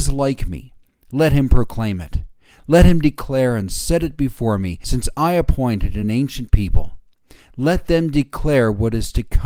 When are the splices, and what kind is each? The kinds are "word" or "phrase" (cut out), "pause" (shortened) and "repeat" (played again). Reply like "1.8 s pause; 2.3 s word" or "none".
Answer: none